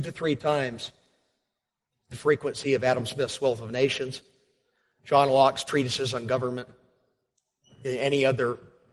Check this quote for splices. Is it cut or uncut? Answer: uncut